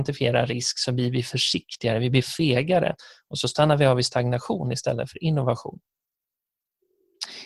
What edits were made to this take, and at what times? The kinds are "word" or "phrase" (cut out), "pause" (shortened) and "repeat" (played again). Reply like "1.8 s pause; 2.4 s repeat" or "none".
none